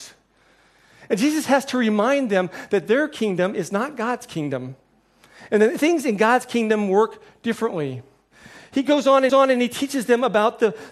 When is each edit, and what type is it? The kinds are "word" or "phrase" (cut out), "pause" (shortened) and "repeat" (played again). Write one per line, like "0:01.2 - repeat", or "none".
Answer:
0:09.3 - repeat